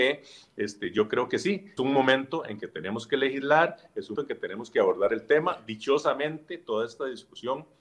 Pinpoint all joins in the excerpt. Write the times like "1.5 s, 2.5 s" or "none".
1.8 s, 4.1 s